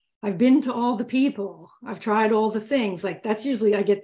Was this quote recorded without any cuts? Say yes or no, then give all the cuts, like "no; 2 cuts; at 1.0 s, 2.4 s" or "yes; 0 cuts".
yes; 0 cuts